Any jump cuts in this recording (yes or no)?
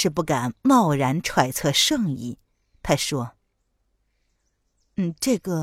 no